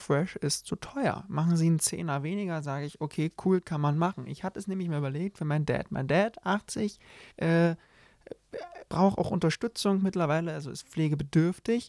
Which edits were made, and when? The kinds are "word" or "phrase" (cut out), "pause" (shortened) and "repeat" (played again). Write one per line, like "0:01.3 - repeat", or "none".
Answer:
0:07.3 - pause
0:08.9 - pause